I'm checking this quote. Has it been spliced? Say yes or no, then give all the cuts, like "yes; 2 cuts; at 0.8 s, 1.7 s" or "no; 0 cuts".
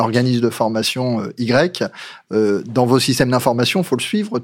no; 0 cuts